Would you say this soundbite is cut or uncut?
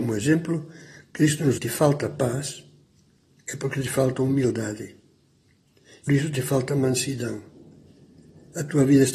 cut